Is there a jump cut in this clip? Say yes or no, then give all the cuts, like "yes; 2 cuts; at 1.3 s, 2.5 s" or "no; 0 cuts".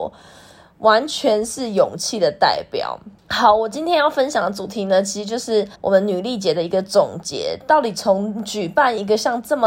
yes; 1 cut; at 5.7 s